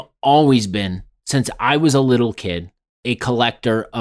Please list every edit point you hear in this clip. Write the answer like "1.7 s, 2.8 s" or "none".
none